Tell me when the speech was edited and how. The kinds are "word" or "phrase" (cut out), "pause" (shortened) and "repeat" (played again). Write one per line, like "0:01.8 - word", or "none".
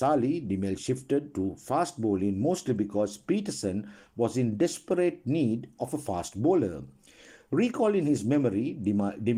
none